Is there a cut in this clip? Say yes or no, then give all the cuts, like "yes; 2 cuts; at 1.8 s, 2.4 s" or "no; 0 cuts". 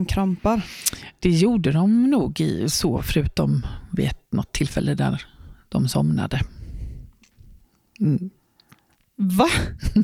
no; 0 cuts